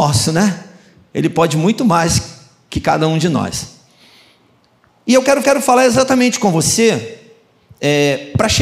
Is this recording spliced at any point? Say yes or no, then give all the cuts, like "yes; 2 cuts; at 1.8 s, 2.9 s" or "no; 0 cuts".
yes; 1 cut; at 5.4 s